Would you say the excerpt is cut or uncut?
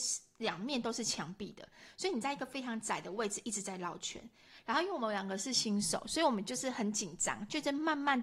uncut